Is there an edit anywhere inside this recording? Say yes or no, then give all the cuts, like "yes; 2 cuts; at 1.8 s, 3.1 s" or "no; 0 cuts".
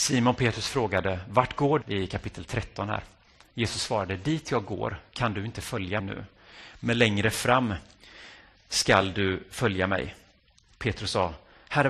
yes; 2 cuts; at 1.8 s, 6.0 s